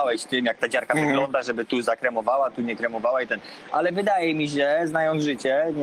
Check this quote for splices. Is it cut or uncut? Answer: uncut